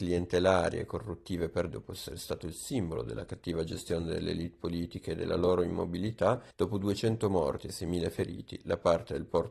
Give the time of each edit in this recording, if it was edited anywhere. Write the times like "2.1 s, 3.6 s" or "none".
1.7 s, 6.5 s